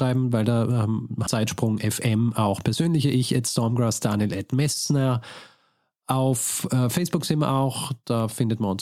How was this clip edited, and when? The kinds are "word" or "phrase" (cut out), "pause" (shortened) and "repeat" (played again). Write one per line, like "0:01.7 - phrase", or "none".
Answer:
0:01.3 - phrase